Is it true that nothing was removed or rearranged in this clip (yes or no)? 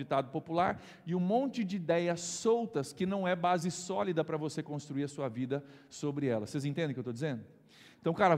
yes